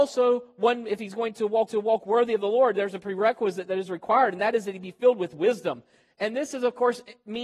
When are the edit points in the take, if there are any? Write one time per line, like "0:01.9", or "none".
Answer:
0:01.7